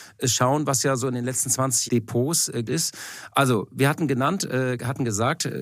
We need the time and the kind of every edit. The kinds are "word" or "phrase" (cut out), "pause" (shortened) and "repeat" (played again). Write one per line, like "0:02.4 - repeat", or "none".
0:01.9 - phrase
0:02.6 - word